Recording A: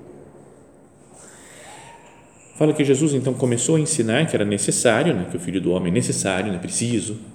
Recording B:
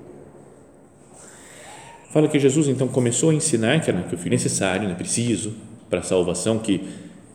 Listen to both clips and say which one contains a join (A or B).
B